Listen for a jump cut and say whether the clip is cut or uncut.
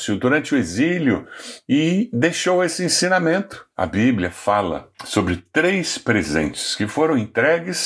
cut